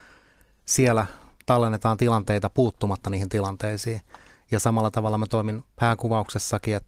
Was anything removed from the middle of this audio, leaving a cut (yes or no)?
no